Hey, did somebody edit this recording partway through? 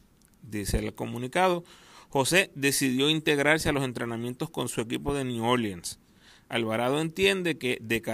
no; 0 cuts

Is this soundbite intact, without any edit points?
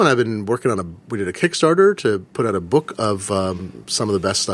yes; 0 cuts

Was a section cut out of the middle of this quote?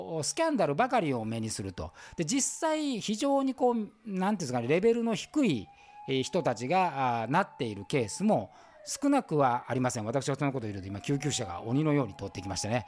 no; 0 cuts

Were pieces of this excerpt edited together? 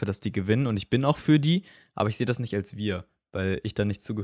no; 0 cuts

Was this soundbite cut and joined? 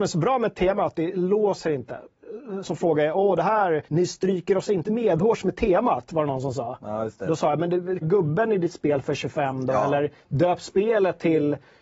yes; 4 cuts; at 2.6 s, 3.9 s, 4.9 s, 8.0 s

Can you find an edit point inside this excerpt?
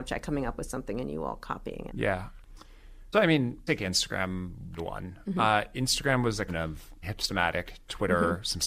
yes; 6 cuts; at 1.9 s, 3.1 s, 3.7 s, 4.8 s, 6.5 s, 7.0 s

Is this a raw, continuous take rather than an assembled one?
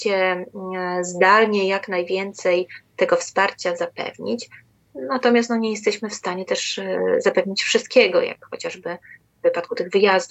yes; 0 cuts

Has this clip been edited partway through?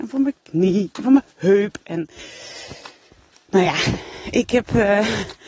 no; 0 cuts

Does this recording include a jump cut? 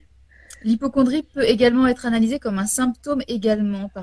no; 0 cuts

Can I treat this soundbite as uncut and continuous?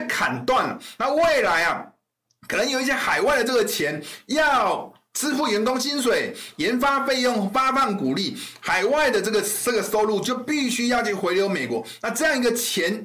yes; 0 cuts

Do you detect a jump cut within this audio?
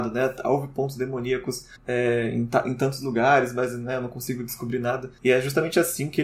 yes; 1 cut; at 1.8 s

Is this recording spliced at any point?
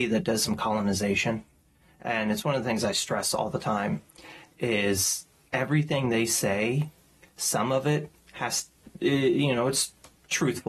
no; 0 cuts

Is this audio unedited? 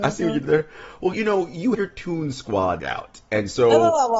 no; 3 cuts; at 1.1 s, 1.7 s, 2.8 s

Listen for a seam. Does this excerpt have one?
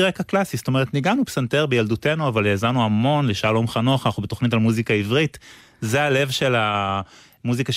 no; 0 cuts

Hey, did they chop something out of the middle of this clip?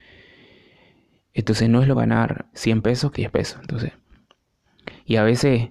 yes; 3 cuts; at 1.9 s, 2.5 s, 3.1 s

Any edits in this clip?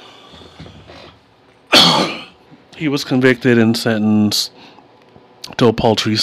no; 0 cuts

